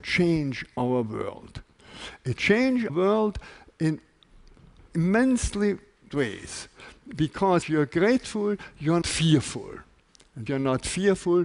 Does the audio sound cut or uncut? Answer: cut